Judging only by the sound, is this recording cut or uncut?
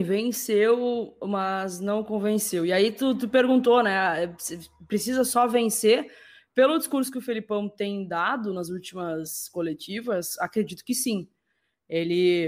uncut